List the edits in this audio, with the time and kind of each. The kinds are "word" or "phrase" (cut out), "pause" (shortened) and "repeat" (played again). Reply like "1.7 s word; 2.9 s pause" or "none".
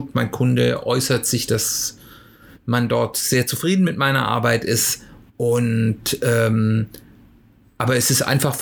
none

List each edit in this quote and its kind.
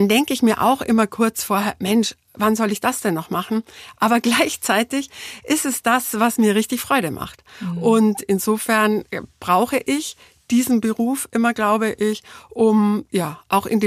none

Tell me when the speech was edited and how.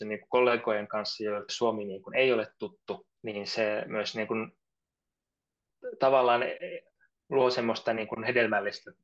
1.5 s word; 3.2 s pause; 7.1 s pause

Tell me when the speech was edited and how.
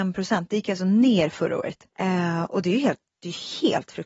1.9 s pause

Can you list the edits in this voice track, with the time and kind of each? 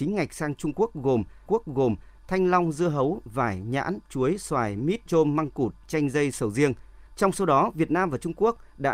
1.5 s repeat; 5.1 s word; 7.1 s pause

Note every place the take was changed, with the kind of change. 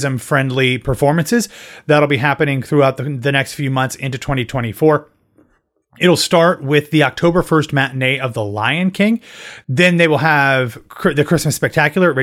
none

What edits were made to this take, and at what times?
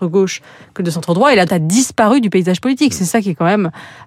1.5 s word

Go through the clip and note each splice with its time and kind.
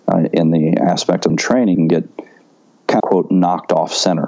1.3 s word; 1.7 s word; 3.0 s word

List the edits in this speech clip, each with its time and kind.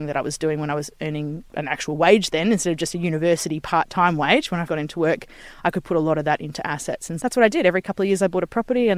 4.7 s word; 7.2 s word

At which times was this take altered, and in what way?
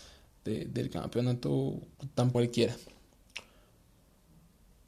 2.3 s phrase

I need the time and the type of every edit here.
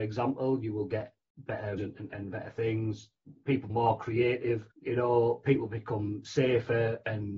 1.8 s word; 2.1 s word; 3.7 s word; 4.7 s pause

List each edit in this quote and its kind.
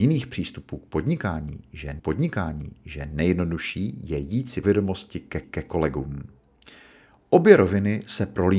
2.0 s repeat; 4.6 s word; 5.4 s repeat

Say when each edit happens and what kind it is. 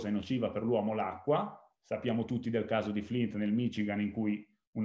none

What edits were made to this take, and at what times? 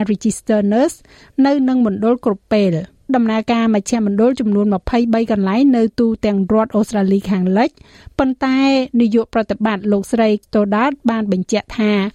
3.1 s word; 10.4 s word

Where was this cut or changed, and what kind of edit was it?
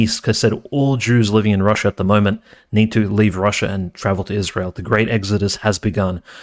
none

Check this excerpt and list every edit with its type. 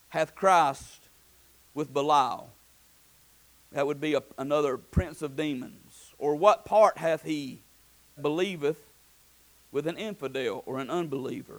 8.2 s word

